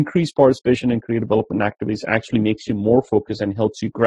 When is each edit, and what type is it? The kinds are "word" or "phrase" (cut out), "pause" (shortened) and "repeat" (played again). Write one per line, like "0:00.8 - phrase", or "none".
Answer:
none